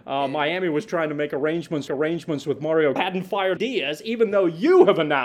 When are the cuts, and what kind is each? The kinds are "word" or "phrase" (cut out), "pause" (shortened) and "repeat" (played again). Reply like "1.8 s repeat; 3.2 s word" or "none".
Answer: 1.9 s repeat; 3.0 s phrase; 3.6 s word